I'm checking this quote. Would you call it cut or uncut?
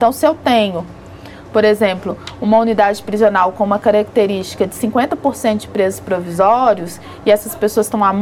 uncut